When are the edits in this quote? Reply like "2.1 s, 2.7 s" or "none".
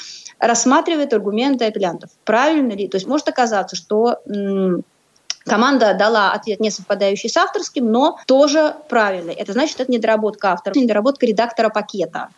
3.0 s, 8.2 s, 10.7 s